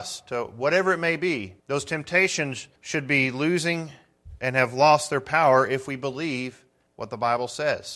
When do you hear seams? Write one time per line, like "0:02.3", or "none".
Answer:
0:01.6
0:02.8
0:06.9